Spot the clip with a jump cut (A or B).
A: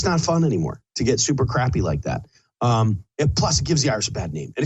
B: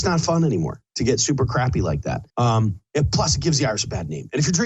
B